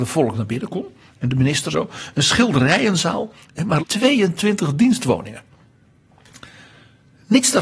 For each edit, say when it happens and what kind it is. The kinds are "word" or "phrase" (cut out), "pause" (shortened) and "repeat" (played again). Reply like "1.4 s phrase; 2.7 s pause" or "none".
1.7 s word; 3.8 s word